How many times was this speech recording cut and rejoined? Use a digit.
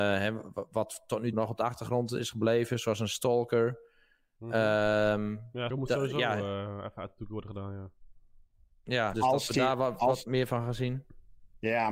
3